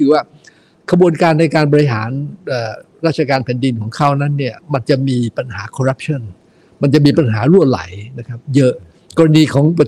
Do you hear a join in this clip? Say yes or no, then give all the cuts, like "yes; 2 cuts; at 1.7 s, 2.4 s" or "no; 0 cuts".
no; 0 cuts